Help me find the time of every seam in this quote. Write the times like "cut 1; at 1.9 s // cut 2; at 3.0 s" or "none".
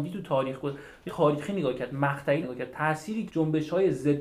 cut 1; at 1.1 s // cut 2; at 2.4 s // cut 3; at 3.3 s